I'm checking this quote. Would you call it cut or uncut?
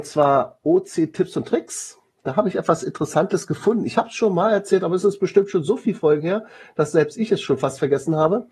uncut